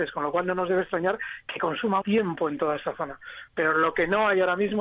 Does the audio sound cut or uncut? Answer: cut